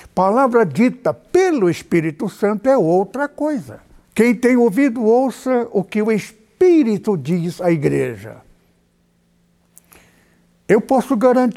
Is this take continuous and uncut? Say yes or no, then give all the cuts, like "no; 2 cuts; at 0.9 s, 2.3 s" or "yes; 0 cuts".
no; 1 cut; at 4.0 s